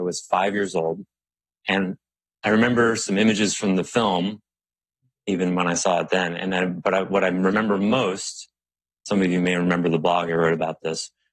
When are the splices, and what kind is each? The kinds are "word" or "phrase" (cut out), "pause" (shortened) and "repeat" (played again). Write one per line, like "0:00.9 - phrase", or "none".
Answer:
0:01.3 - pause